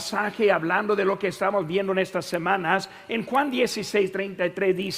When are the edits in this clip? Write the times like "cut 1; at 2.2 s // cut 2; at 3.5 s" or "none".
none

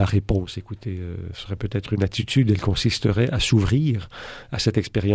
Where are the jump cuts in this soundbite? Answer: none

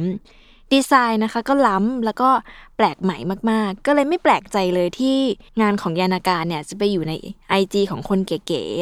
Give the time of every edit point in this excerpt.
none

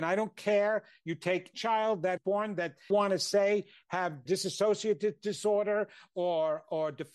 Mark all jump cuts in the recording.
cut 1; at 1.5 s // cut 2; at 2.2 s // cut 3; at 2.9 s // cut 4; at 4.3 s

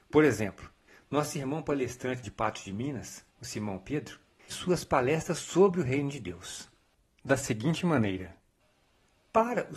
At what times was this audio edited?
cut 1; at 2.2 s // cut 2; at 3.3 s // cut 3; at 4.5 s

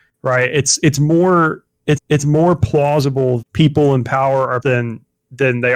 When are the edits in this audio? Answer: cut 1; at 2.0 s // cut 2; at 3.4 s // cut 3; at 4.6 s

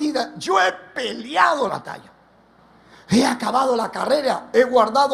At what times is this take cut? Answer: cut 1; at 1.7 s

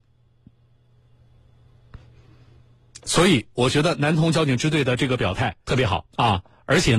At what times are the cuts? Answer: cut 1; at 5.6 s // cut 2; at 6.1 s

